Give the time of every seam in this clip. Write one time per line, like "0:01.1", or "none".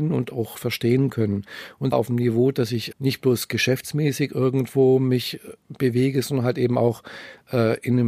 0:01.9
0:02.9